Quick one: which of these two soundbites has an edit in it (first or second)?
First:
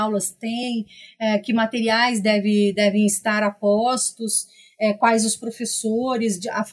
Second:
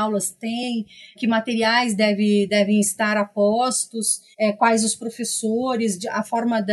second